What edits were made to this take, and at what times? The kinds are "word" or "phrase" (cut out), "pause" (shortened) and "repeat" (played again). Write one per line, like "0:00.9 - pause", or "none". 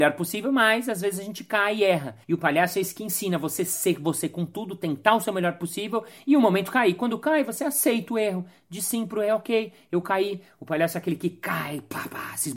0:02.2 - pause